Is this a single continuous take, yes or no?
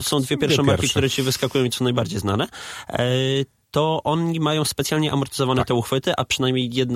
yes